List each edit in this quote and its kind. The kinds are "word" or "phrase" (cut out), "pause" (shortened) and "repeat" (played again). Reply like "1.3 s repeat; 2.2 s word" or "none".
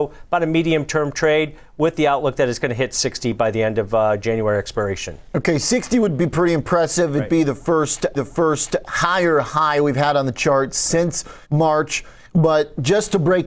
8.1 s repeat; 11.4 s pause